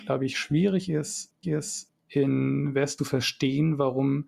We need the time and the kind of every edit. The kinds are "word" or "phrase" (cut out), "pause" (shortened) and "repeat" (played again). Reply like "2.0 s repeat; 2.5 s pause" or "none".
1.4 s repeat; 3.0 s phrase